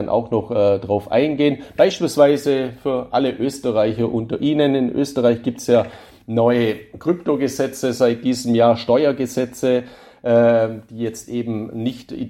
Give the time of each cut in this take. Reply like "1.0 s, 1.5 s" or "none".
none